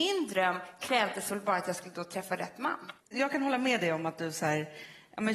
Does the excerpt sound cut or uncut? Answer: cut